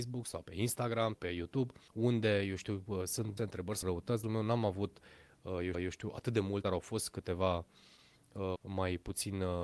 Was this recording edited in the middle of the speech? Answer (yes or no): yes